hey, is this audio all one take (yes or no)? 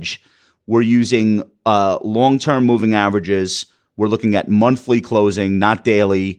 yes